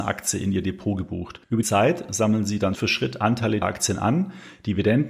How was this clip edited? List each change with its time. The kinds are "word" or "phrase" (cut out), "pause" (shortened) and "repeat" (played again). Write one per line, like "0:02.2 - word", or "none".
0:01.6 - word
0:02.7 - word
0:03.6 - word